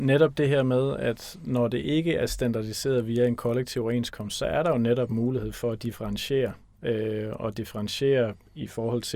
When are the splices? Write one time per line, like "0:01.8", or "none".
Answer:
none